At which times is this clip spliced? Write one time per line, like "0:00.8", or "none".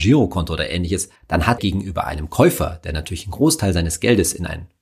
0:01.2
0:01.6